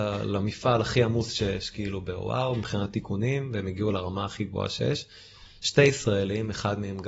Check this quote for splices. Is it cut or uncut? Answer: uncut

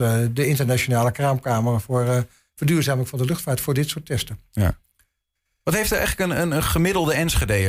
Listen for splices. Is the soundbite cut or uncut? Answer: uncut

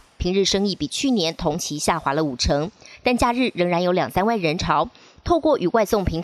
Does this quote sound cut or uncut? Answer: uncut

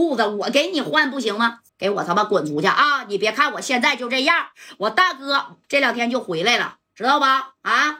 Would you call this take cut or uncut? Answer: cut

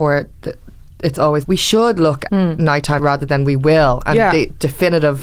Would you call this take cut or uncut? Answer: cut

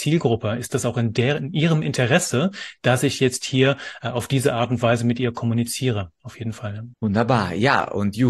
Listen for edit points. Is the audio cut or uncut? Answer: cut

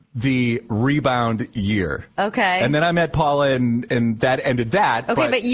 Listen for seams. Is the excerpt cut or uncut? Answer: uncut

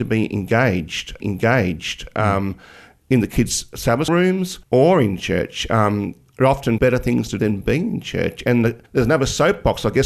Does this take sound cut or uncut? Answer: cut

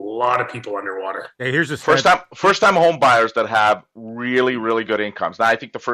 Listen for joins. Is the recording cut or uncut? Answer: uncut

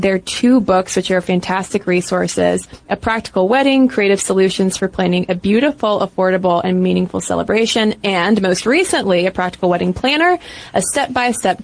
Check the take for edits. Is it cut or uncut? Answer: uncut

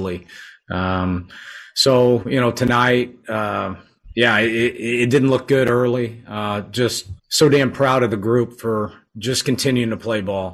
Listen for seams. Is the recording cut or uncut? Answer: cut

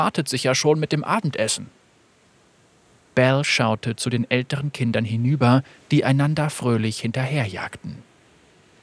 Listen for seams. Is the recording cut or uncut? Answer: uncut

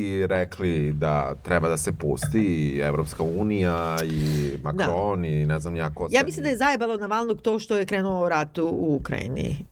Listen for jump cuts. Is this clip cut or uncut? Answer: uncut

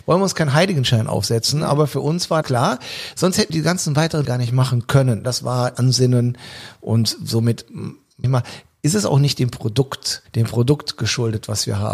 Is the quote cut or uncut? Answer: cut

